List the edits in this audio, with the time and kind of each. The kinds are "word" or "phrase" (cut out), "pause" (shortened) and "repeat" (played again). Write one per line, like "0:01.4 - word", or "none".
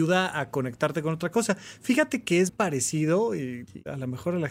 0:02.5 - word